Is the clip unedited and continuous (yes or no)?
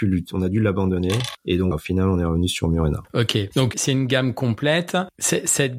no